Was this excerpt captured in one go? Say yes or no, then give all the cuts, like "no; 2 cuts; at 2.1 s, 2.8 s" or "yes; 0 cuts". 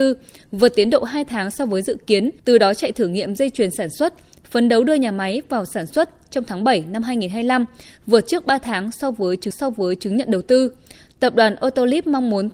no; 2 cuts; at 2.4 s, 9.5 s